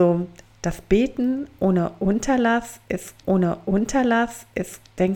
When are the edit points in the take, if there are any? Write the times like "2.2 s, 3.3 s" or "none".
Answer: 3.2 s

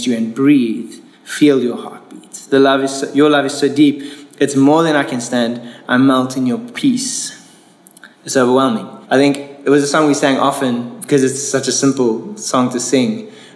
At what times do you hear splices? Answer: 1.1 s, 8.1 s, 9.0 s

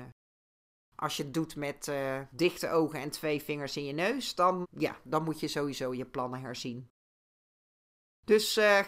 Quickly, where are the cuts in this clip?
4.6 s

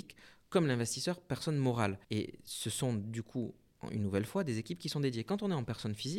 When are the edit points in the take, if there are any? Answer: 2.0 s

